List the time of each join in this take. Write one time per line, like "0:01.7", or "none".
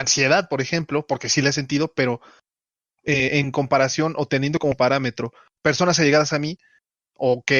none